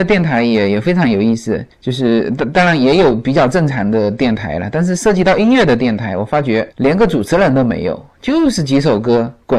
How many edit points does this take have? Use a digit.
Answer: 2